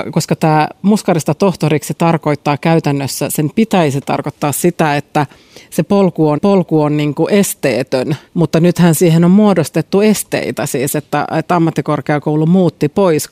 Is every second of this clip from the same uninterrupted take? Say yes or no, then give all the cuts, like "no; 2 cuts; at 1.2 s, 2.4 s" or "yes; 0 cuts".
no; 2 cuts; at 6.4 s, 8.3 s